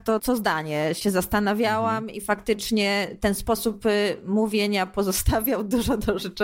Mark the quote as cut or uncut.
uncut